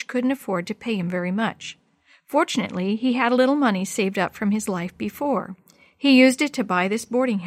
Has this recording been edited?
no; 0 cuts

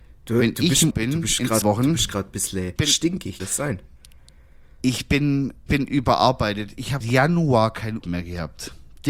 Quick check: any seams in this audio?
yes; 7 cuts; at 0.9 s, 1.6 s, 2.8 s, 3.4 s, 5.7 s, 7.0 s, 8.0 s

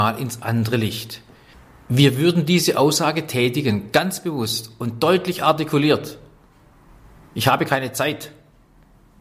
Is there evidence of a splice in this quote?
no; 0 cuts

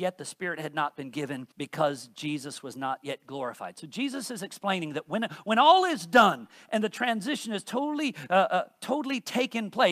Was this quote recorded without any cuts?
no; 1 cut; at 1.5 s

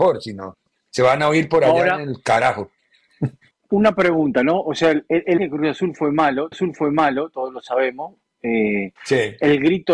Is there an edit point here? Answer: yes; 4 cuts; at 3.5 s, 5.4 s, 6.5 s, 9.0 s

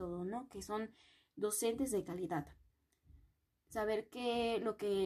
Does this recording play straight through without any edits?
yes; 0 cuts

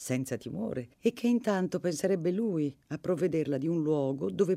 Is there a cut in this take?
yes; 1 cut; at 0.9 s

